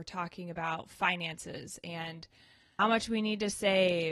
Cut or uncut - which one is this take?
cut